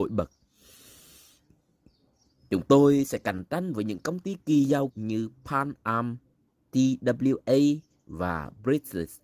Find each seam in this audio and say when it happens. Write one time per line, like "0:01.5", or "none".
0:04.4
0:04.9